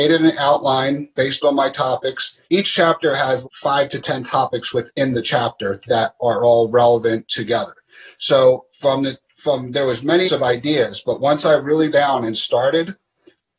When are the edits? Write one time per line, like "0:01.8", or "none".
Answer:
0:02.4
0:03.4
0:08.7
0:10.2
0:11.9

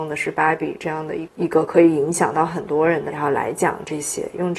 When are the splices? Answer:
0:03.1

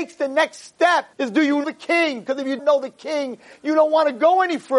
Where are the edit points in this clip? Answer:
0:01.1
0:01.6
0:02.6

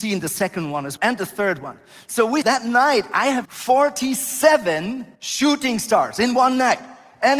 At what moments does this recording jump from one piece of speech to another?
0:01.0
0:02.4
0:03.4
0:05.1

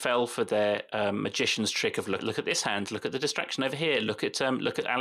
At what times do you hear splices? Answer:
0:02.2

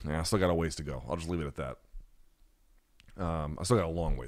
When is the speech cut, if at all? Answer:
none

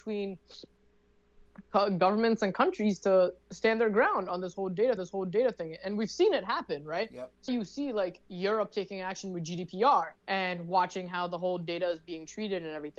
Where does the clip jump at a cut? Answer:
0:05.0
0:07.5
0:10.2

